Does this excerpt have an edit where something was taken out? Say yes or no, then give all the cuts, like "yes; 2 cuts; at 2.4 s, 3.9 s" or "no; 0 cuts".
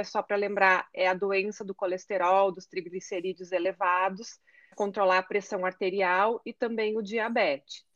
yes; 1 cut; at 4.7 s